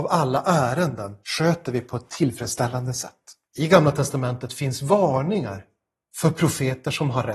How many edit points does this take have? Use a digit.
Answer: 2